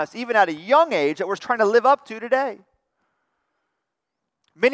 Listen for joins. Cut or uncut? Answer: cut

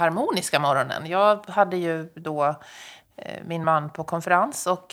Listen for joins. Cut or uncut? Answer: uncut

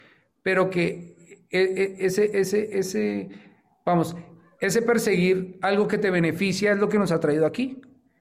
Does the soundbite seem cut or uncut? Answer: uncut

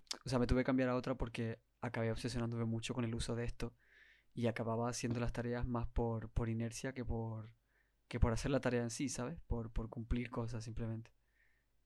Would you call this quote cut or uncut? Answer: uncut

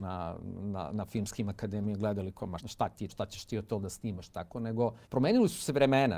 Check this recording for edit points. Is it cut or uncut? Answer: cut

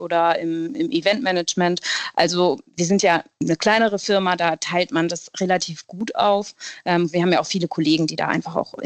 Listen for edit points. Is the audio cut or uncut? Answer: uncut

